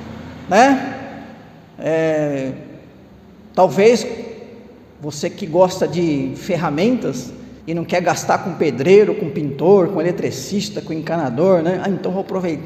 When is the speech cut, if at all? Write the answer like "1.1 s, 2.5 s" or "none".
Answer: 7.6 s